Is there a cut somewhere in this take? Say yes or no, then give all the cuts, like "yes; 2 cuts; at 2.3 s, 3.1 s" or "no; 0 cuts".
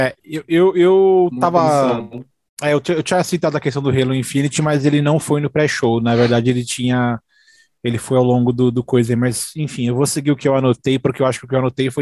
no; 0 cuts